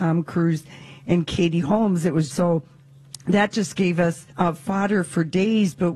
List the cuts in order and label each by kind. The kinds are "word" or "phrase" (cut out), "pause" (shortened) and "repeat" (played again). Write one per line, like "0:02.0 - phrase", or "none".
0:02.3 - word
0:04.3 - pause